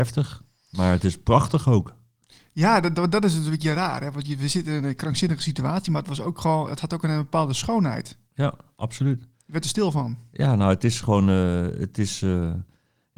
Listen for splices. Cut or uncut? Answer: uncut